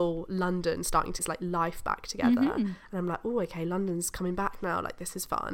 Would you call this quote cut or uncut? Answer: cut